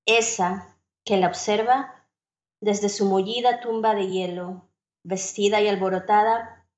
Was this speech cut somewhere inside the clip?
no; 0 cuts

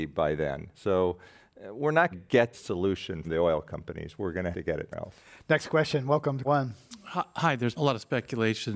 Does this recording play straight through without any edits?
no; 7 cuts; at 2.1 s, 2.5 s, 3.2 s, 4.5 s, 4.9 s, 6.4 s, 7.8 s

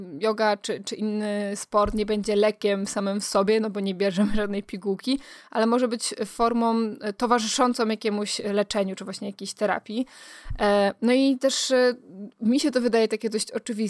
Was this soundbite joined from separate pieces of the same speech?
no; 0 cuts

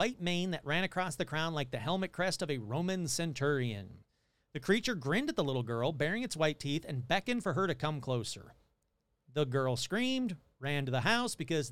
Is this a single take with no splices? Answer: yes; 0 cuts

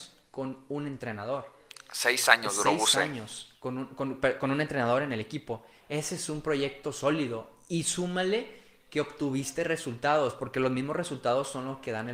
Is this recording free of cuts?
yes; 0 cuts

